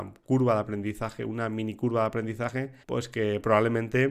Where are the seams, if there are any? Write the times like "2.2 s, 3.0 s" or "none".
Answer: 2.8 s